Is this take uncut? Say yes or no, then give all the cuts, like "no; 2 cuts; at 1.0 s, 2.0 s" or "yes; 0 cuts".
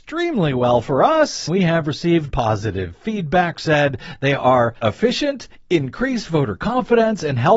no; 4 cuts; at 1.5 s, 2.3 s, 3.5 s, 4.8 s